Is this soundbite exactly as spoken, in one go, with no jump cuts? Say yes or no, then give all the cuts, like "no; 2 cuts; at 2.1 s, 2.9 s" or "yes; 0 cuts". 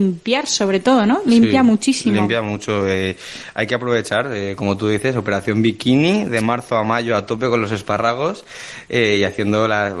yes; 0 cuts